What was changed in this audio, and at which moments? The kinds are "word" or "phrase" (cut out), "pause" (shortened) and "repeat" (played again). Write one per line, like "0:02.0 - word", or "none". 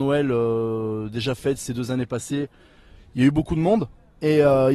none